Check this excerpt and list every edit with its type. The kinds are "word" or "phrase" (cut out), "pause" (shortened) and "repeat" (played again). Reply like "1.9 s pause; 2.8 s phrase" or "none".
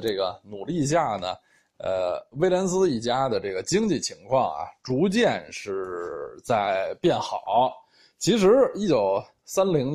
none